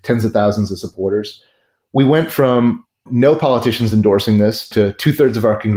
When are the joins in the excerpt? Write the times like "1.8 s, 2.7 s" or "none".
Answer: none